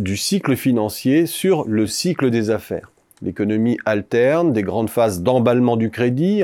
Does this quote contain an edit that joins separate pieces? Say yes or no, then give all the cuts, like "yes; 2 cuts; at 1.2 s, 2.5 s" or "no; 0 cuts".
no; 0 cuts